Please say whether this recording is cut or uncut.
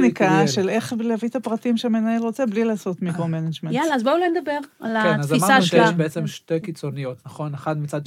uncut